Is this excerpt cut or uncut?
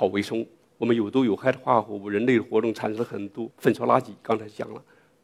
cut